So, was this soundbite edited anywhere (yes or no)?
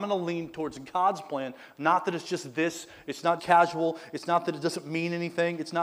yes